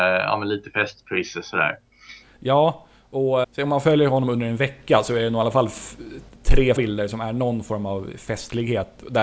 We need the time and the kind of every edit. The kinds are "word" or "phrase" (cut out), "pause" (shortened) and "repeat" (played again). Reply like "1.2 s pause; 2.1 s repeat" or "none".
3.4 s word; 6.8 s word